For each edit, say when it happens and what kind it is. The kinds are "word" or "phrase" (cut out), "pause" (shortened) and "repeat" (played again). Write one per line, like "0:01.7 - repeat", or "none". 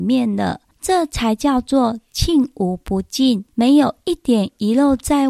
0:03.5 - pause